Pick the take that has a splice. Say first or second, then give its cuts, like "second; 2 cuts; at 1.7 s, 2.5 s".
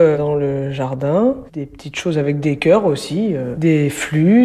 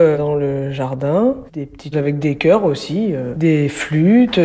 second; 1 cut; at 1.9 s